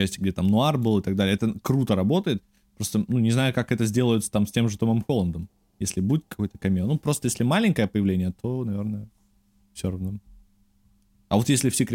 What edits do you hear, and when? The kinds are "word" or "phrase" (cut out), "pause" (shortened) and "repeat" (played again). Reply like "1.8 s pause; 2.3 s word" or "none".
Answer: none

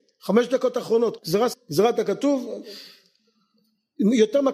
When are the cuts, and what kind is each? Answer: 1.2 s word; 1.5 s word

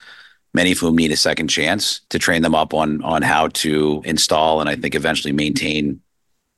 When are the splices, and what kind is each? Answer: 2.1 s pause

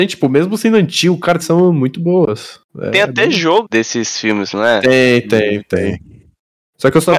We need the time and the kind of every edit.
1.4 s phrase; 2.7 s pause; 3.7 s word

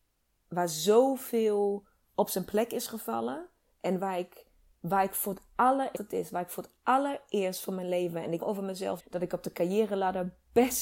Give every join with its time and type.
4.7 s pause; 5.9 s phrase; 8.4 s word; 9.0 s word

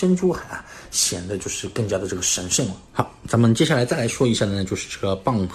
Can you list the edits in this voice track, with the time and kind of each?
2.9 s pause

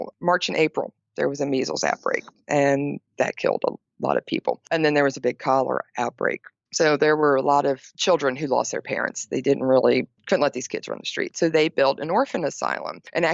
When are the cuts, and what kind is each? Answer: none

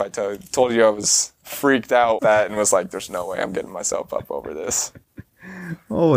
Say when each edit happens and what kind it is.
2.2 s phrase

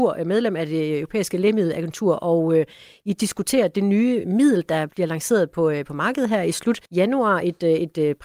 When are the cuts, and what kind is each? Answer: 6.9 s pause

